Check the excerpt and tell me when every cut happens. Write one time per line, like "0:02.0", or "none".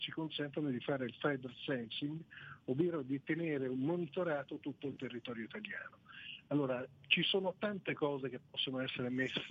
0:03.2